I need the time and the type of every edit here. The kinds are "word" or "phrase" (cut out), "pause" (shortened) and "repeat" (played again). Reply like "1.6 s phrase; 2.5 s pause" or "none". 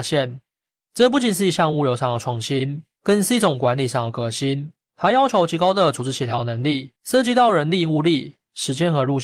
7.0 s pause